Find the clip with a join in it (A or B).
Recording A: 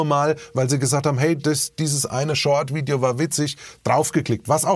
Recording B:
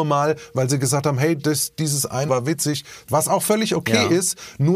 B